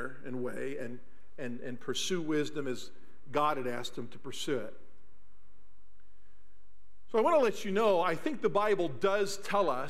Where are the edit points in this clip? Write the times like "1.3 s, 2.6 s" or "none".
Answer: none